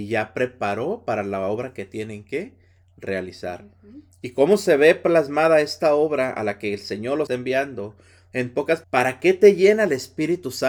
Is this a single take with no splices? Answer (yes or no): no